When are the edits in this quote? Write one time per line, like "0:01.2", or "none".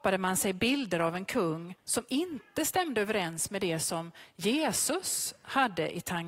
0:01.8